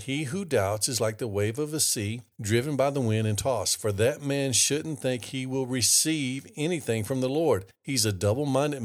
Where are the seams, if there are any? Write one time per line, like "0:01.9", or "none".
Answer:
0:02.3
0:07.7